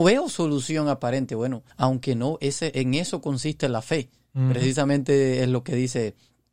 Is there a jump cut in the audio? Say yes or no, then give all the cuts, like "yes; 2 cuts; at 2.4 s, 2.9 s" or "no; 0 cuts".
yes; 1 cut; at 1.7 s